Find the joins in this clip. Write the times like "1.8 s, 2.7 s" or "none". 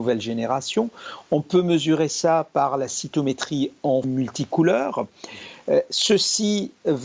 4.0 s